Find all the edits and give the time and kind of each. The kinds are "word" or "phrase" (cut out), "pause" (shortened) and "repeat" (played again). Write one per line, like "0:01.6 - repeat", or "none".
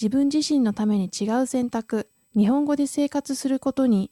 0:02.2 - pause